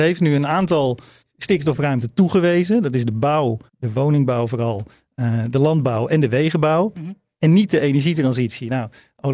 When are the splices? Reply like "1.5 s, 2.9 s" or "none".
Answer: 1.2 s, 3.7 s